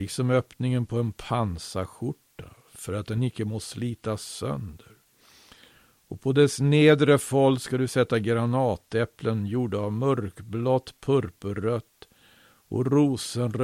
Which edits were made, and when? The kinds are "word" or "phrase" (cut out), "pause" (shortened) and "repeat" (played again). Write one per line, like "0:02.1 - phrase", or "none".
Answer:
none

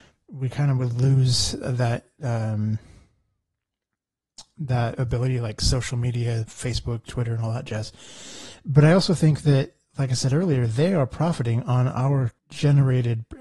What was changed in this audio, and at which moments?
0:12.4 - pause

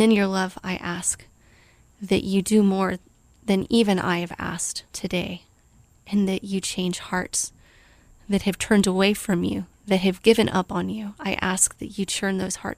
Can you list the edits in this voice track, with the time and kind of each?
0:04.9 - pause

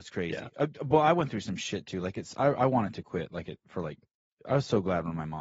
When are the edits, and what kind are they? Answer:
none

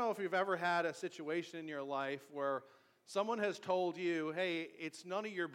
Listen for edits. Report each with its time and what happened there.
none

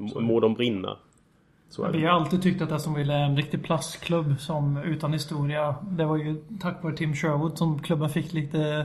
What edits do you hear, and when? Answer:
none

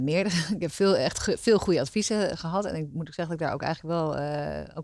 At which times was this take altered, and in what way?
none

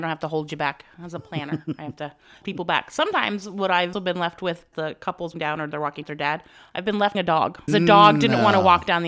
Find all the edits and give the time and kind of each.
0:02.4 - word
0:03.9 - word
0:04.7 - word
0:05.3 - word
0:06.0 - word
0:07.1 - word
0:07.7 - word

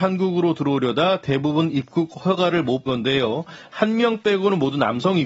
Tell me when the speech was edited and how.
0:02.9 - word

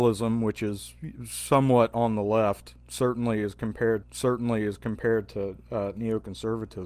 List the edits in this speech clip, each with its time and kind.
0:04.0 - repeat

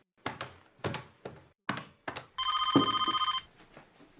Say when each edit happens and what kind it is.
none

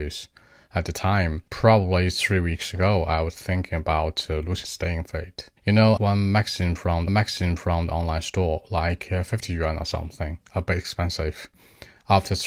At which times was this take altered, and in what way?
0:01.5 - pause
0:04.6 - phrase
0:05.6 - pause
0:06.0 - phrase
0:07.1 - repeat

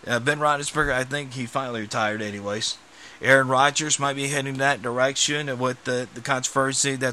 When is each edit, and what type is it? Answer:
none

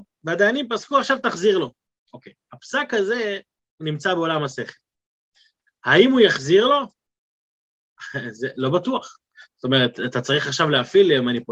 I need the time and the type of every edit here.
none

